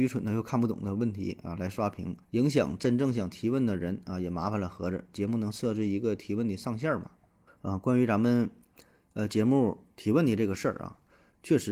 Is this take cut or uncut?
cut